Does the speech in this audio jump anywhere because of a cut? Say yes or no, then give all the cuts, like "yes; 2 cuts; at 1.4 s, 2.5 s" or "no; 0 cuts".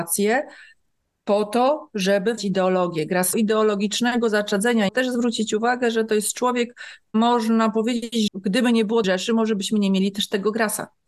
yes; 5 cuts; at 2.4 s, 3.3 s, 4.9 s, 8.3 s, 9.0 s